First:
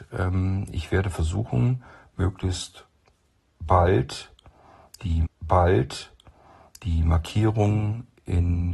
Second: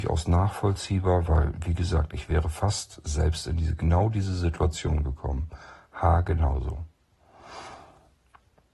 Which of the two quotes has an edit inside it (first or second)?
first